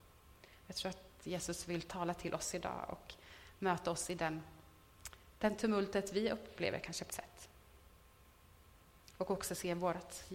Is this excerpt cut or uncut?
cut